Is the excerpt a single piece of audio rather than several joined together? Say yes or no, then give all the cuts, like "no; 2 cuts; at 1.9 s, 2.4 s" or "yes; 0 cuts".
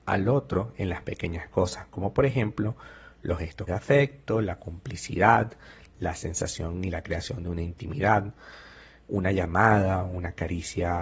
no; 1 cut; at 3.7 s